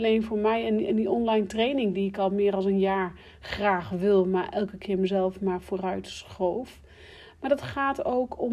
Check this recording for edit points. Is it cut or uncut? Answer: uncut